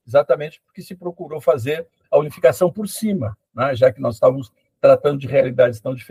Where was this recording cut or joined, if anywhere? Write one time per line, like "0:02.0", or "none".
none